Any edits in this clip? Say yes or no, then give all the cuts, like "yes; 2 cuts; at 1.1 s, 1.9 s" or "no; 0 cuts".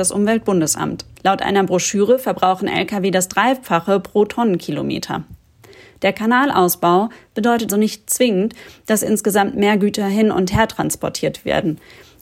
yes; 2 cuts; at 1.1 s, 7.7 s